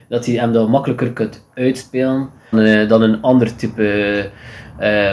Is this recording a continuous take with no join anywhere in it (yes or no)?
no